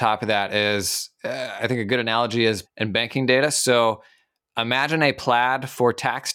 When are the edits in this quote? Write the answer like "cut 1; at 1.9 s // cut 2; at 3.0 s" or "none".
cut 1; at 2.6 s